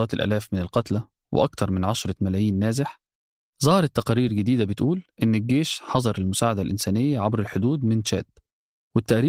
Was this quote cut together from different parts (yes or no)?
no